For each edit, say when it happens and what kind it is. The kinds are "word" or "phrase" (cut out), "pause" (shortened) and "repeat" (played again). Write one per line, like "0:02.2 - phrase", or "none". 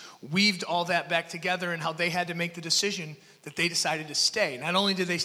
none